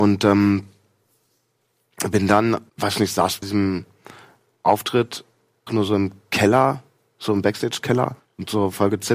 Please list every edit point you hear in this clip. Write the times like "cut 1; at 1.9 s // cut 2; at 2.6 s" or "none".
cut 1; at 2.7 s // cut 2; at 3.4 s // cut 3; at 5.7 s // cut 4; at 8.2 s

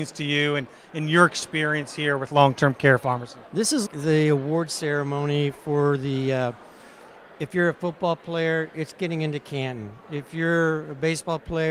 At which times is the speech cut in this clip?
cut 1; at 3.5 s // cut 2; at 3.9 s

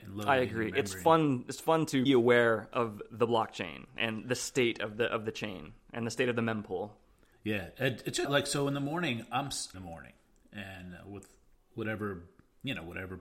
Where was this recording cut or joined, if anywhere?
cut 1; at 2.1 s // cut 2; at 7.3 s // cut 3; at 8.2 s // cut 4; at 9.7 s // cut 5; at 11.5 s

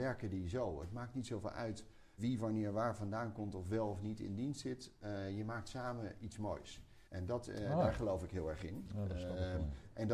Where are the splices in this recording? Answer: cut 1; at 2.2 s // cut 2; at 7.0 s

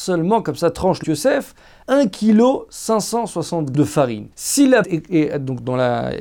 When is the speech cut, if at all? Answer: cut 1; at 1.0 s // cut 2; at 1.8 s // cut 3; at 3.7 s // cut 4; at 4.3 s // cut 5; at 4.8 s

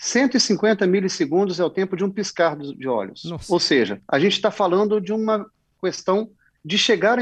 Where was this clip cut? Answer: none

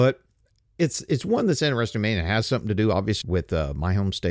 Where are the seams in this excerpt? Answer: cut 1; at 3.2 s

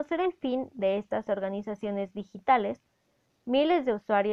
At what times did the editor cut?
none

